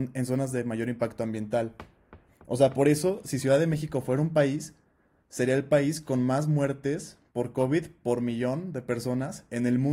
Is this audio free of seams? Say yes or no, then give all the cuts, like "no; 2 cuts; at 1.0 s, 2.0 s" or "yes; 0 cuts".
yes; 0 cuts